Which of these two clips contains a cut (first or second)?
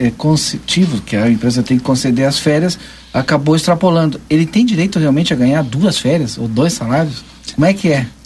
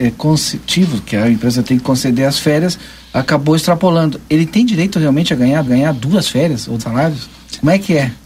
second